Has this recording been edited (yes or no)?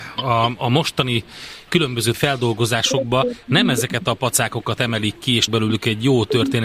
yes